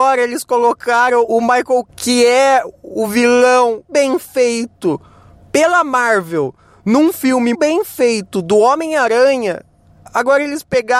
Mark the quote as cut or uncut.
cut